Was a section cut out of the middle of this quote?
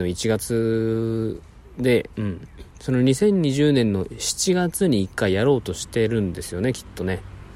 yes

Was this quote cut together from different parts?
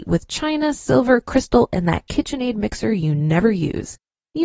no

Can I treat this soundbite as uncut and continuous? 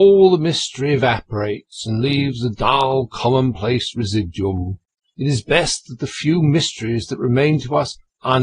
no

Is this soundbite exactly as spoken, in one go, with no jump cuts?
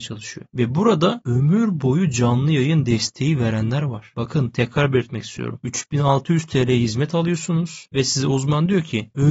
yes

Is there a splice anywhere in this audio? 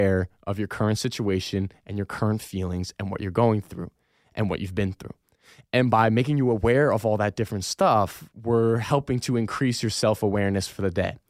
no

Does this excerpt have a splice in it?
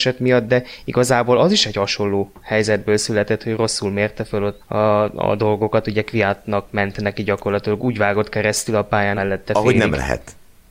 yes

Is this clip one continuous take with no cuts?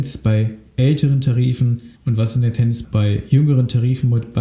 no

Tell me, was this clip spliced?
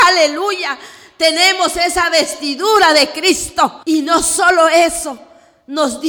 yes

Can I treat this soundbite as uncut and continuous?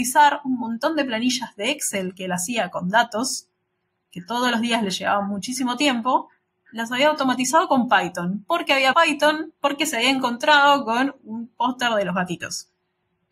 no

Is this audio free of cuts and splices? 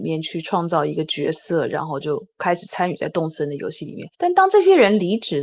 no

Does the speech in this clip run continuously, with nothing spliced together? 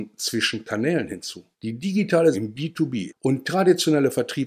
no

